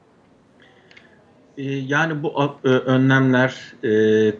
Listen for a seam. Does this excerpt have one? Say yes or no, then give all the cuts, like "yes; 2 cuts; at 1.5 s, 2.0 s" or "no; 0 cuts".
yes; 1 cut; at 2.6 s